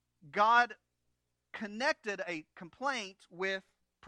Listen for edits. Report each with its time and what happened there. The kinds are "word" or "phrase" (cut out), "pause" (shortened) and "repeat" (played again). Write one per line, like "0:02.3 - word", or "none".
none